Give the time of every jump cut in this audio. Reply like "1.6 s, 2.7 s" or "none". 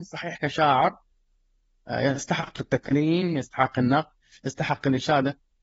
none